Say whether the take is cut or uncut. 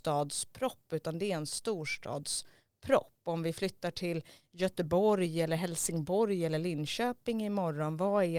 uncut